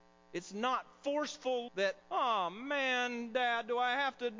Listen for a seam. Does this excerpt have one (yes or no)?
yes